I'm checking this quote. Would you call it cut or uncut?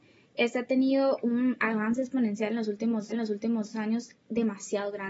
cut